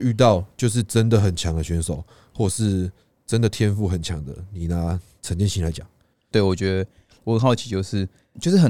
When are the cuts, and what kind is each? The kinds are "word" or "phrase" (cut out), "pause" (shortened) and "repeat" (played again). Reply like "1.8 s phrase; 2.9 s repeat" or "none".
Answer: none